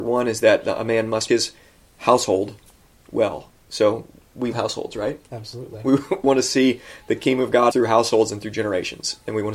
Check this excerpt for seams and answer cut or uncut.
cut